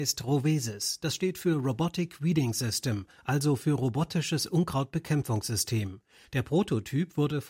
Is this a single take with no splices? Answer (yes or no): yes